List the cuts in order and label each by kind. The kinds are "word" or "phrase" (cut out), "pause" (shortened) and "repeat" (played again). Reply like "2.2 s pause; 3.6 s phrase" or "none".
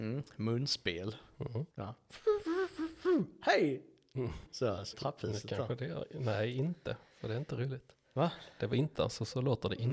1.7 s pause; 4.5 s word; 4.9 s phrase; 8.9 s word